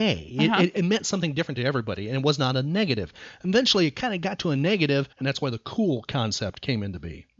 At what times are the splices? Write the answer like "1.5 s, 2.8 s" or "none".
5.1 s